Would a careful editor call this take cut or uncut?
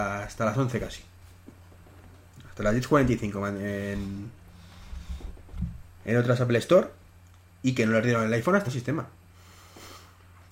cut